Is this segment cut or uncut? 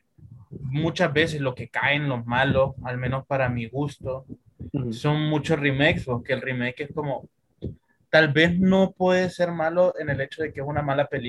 uncut